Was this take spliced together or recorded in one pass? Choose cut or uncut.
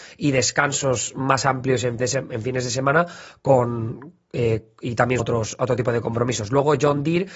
cut